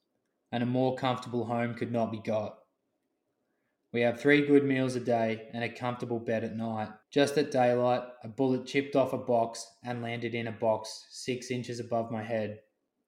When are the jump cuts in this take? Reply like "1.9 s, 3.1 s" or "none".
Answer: 7.0 s